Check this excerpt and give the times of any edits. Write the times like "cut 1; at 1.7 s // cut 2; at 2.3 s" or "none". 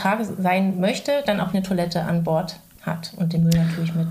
cut 1; at 1.5 s

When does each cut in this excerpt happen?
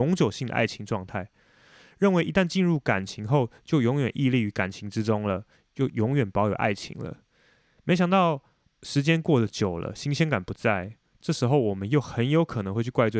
none

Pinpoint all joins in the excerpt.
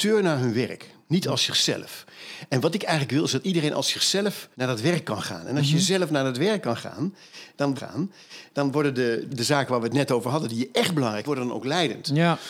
cut 1; at 4.5 s // cut 2; at 5.6 s // cut 3; at 7.8 s // cut 4; at 9.3 s // cut 5; at 11.2 s

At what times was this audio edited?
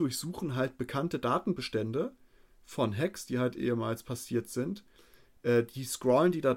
none

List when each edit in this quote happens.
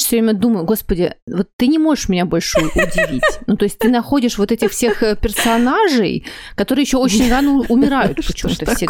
none

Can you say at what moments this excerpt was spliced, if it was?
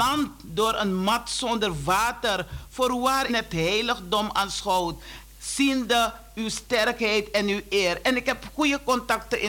cut 1; at 3.3 s

